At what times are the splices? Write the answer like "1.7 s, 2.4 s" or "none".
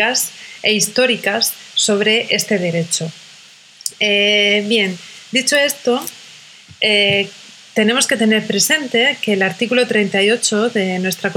none